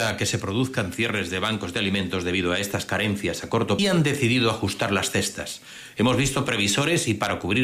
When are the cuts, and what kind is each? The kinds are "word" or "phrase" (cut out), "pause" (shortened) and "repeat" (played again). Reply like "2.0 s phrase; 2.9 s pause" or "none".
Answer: 3.8 s phrase